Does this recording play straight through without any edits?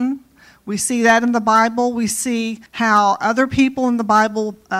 no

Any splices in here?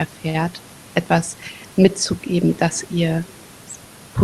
no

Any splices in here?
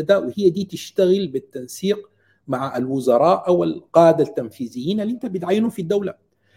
no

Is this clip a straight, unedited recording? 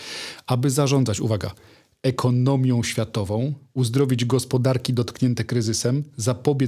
yes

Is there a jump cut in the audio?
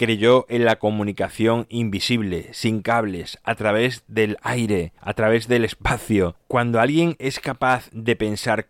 yes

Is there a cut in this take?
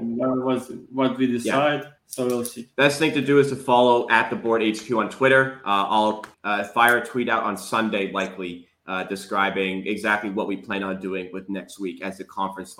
yes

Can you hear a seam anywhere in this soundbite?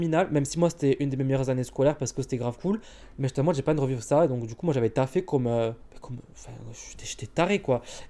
yes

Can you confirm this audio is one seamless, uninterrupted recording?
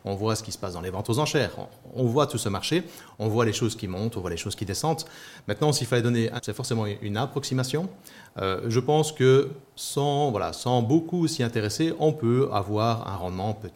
no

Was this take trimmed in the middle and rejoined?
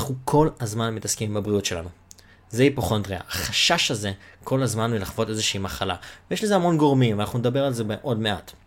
no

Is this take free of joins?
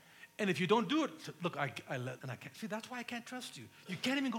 no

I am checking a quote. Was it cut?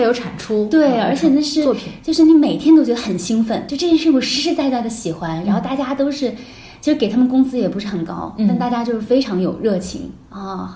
yes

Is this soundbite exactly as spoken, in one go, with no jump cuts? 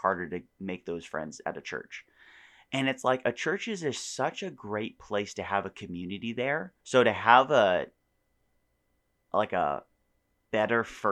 no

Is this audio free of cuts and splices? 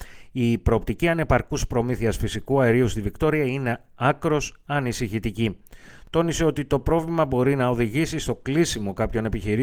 yes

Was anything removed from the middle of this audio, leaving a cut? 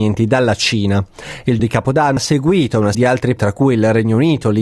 yes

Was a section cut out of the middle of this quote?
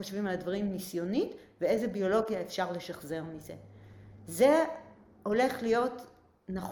no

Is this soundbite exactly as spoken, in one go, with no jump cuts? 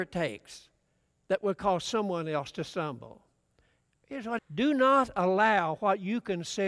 no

